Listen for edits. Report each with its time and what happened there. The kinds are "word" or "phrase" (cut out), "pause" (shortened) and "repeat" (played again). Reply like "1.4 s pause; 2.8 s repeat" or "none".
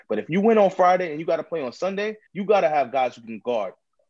2.3 s pause